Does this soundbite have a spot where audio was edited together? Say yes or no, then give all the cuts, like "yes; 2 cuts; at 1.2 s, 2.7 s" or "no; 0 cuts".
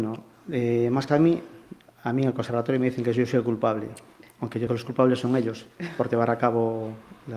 yes; 2 cuts; at 1.1 s, 4.7 s